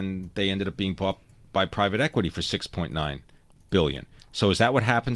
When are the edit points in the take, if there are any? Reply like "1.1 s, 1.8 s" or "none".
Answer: none